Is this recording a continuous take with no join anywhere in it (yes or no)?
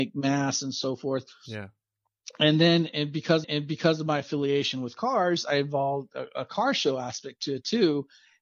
no